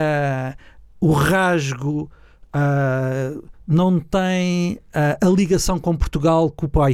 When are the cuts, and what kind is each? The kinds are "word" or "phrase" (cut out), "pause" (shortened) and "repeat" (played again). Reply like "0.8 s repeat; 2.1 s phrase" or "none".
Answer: none